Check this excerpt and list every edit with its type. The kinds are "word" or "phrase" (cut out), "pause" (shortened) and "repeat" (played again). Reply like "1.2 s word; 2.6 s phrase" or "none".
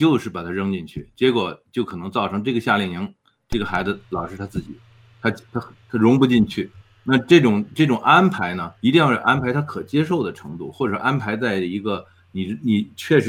6.8 s pause; 8.8 s pause